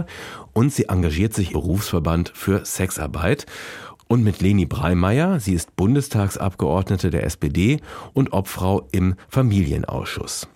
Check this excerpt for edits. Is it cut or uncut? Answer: cut